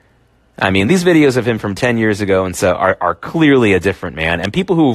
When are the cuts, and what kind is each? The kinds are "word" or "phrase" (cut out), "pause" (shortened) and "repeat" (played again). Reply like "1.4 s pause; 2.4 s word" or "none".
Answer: none